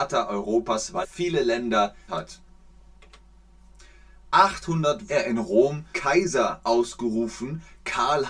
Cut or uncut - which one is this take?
cut